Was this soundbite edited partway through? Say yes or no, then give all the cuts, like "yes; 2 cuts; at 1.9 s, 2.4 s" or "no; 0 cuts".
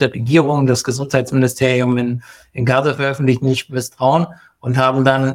no; 0 cuts